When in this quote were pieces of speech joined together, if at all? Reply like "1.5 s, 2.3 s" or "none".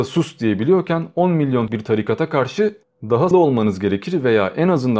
1.7 s, 3.3 s